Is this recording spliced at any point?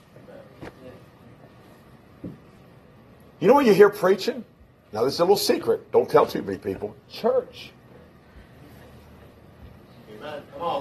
no; 0 cuts

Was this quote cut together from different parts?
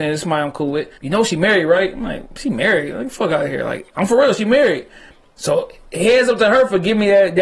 yes; 1 cut; at 1.0 s

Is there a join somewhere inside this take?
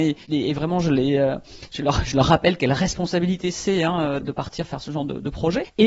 yes; 1 cut; at 4.2 s

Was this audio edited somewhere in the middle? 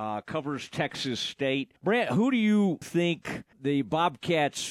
yes; 3 cuts; at 1.8 s, 2.8 s, 3.5 s

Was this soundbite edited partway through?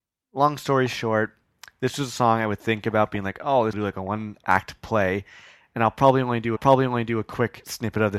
yes; 2 cuts; at 3.7 s, 6.6 s

